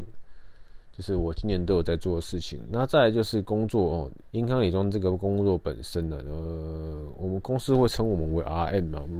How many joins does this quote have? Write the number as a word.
one